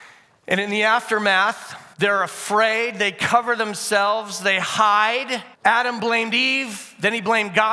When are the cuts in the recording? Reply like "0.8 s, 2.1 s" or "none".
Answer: 1.9 s, 5.5 s